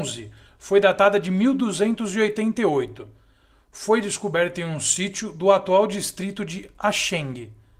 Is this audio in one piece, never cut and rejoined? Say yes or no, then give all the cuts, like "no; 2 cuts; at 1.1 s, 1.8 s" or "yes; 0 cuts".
yes; 0 cuts